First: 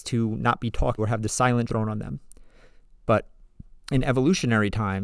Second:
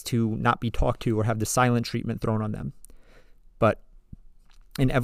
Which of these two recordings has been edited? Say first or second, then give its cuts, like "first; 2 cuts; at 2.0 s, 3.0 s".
first; 3 cuts; at 1.0 s, 1.7 s, 3.8 s